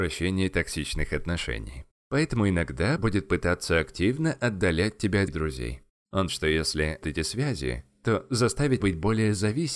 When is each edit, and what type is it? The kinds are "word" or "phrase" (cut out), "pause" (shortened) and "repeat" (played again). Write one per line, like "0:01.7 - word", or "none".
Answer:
0:03.0 - word
0:05.3 - word
0:06.3 - word
0:07.0 - word
0:08.8 - word